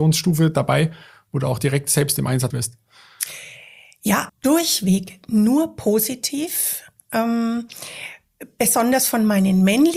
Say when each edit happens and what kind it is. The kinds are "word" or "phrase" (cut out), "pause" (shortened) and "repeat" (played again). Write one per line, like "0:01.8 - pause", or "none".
0:02.5 - word
0:04.3 - word